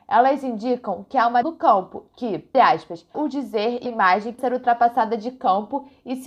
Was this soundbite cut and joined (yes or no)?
yes